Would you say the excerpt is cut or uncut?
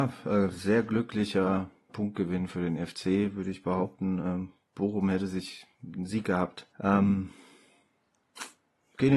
cut